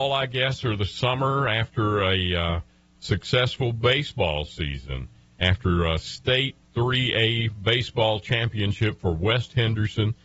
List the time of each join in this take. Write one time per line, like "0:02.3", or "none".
none